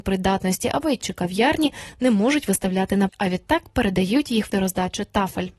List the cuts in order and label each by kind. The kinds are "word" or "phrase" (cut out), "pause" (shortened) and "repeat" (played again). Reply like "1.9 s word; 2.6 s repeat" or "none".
1.0 s word; 3.1 s word; 4.5 s word